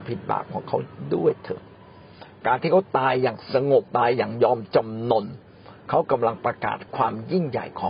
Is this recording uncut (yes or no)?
no